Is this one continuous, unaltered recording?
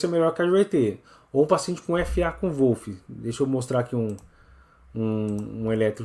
yes; 0 cuts

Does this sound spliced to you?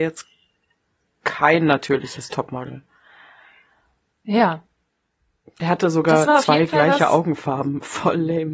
no; 0 cuts

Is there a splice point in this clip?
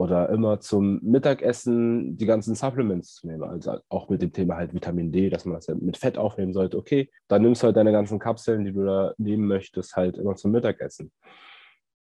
yes; 1 cut; at 7.2 s

